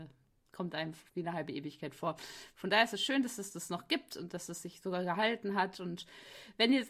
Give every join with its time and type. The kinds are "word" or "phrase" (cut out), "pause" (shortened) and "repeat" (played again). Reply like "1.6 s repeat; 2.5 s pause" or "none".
1.1 s pause